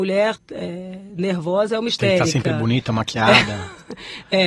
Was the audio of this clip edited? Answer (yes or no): no